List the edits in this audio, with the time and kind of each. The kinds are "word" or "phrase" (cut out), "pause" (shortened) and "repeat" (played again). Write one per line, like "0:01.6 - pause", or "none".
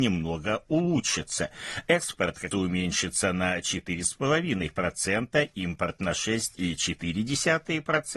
0:02.5 - word

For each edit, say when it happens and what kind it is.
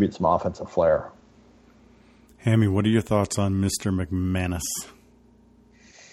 none

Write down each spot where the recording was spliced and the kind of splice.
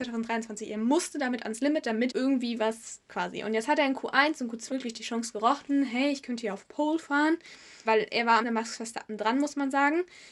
0:02.1 - word
0:03.1 - word
0:04.7 - word
0:07.8 - word
0:08.4 - word

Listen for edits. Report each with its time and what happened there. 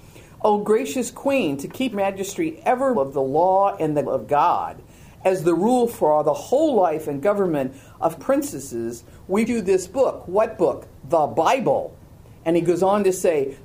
0:01.9 - word
0:02.9 - word
0:04.0 - word
0:08.2 - word
0:09.5 - word

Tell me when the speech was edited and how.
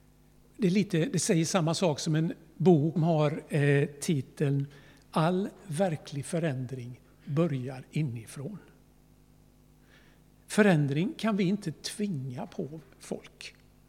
0:03.0 - word

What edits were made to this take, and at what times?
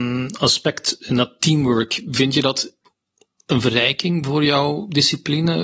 none

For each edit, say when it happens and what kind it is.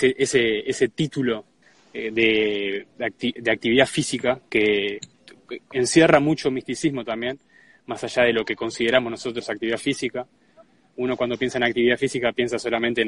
0:01.6 - pause

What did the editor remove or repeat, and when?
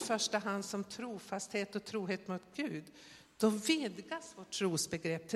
none

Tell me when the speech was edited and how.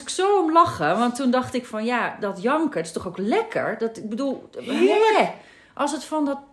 none

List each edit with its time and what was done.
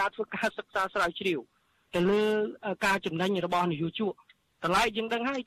none

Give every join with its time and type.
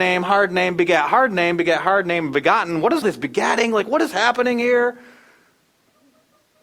0:03.0 - word

